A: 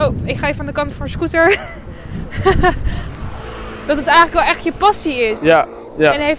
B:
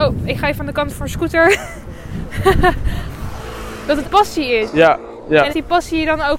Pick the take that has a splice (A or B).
B